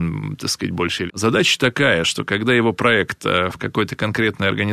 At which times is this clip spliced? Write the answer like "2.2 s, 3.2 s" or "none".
1.1 s